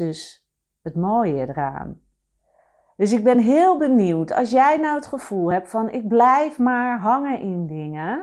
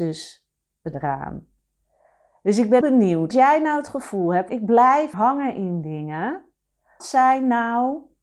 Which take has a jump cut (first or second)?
second